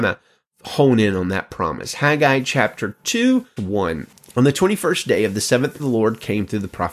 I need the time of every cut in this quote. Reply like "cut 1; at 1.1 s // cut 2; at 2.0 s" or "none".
cut 1; at 3.6 s // cut 2; at 5.8 s